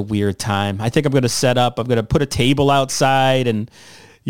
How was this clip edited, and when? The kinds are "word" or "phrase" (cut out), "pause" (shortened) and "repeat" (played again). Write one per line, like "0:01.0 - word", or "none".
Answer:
none